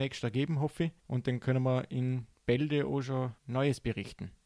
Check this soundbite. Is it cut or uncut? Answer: cut